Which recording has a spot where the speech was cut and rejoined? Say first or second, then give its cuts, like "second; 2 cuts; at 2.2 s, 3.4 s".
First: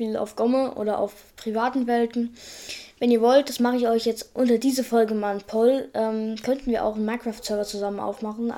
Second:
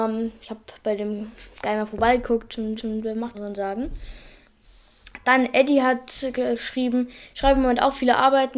second; 3 cuts; at 1.5 s, 2.8 s, 3.3 s